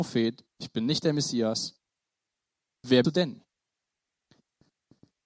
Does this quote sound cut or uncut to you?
cut